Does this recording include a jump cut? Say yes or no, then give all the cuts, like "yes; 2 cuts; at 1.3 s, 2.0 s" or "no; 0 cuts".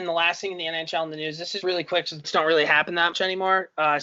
yes; 3 cuts; at 1.6 s, 2.2 s, 3.1 s